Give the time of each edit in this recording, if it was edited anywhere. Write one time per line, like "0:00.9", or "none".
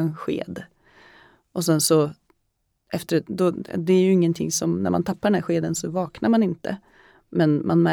none